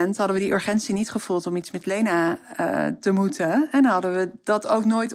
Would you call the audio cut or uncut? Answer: uncut